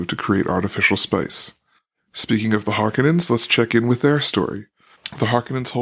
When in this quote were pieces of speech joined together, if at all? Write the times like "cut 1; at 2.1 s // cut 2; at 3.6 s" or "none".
none